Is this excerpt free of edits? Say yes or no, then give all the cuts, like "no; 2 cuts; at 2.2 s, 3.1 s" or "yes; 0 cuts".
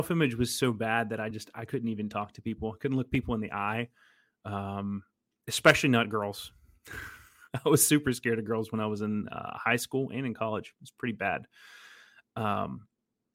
yes; 0 cuts